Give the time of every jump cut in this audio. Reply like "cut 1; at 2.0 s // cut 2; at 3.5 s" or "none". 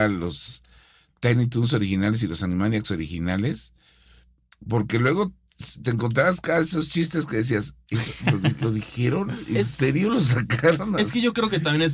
none